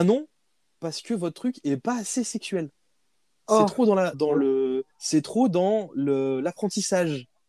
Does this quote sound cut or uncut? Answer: cut